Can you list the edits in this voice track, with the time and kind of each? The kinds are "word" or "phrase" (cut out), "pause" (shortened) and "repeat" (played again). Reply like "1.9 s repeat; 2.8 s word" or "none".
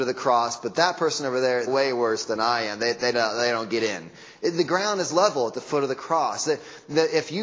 1.7 s word